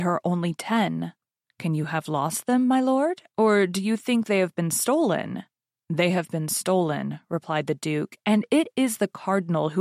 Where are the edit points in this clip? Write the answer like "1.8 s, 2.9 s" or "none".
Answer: none

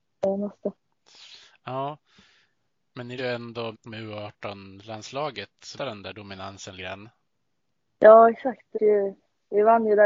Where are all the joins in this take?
3.2 s, 3.7 s, 5.8 s, 6.8 s, 8.7 s

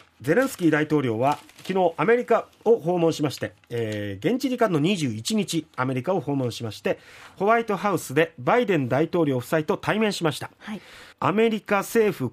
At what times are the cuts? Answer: 11.1 s

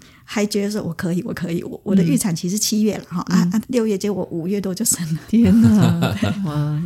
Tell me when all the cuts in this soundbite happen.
3.6 s

